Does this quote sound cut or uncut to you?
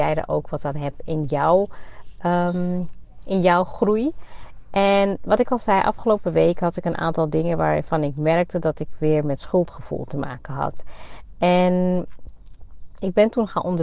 uncut